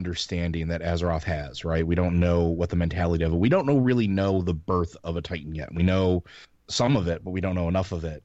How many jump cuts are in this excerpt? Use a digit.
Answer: 0